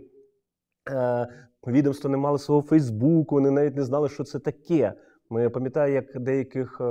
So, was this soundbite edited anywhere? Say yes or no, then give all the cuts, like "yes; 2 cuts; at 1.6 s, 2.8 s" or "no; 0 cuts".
no; 0 cuts